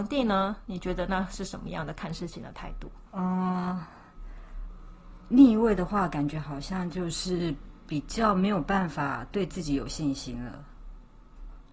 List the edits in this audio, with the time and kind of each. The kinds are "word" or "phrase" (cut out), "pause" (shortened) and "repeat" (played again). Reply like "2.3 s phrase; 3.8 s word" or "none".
3.1 s pause